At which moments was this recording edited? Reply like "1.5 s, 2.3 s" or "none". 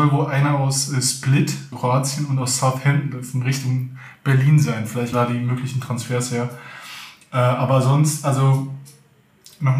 1.7 s, 5.1 s

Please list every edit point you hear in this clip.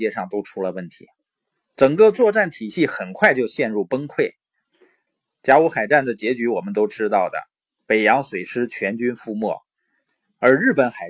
none

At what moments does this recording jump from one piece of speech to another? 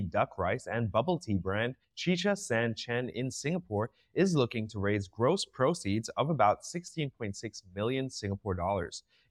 1.8 s

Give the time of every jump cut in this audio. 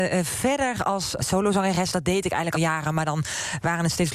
1.2 s, 2.5 s

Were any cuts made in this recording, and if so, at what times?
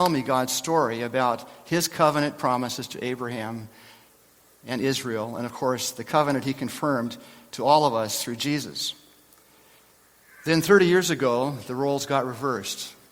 none

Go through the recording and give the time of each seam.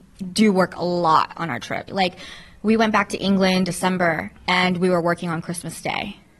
1.9 s, 3.7 s, 4.4 s

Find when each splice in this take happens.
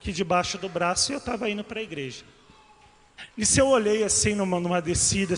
none

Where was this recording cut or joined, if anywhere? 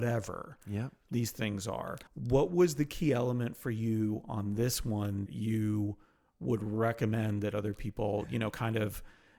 2.1 s, 5.3 s

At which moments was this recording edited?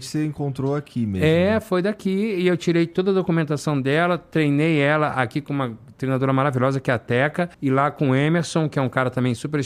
7.5 s

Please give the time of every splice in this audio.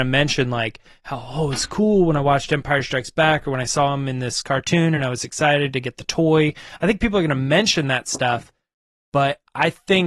none

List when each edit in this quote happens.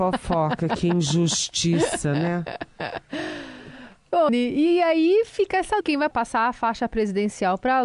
4.3 s, 5.8 s, 6.1 s

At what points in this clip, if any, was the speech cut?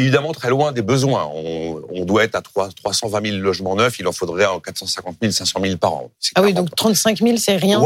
6.1 s

